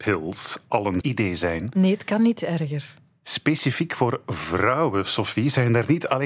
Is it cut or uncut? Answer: cut